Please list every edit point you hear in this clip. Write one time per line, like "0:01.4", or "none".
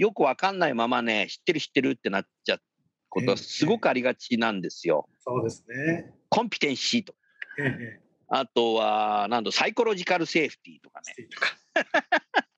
0:05.2